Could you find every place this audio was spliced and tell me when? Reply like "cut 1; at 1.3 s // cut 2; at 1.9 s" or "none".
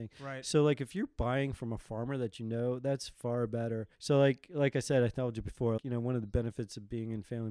cut 1; at 3.9 s // cut 2; at 5.8 s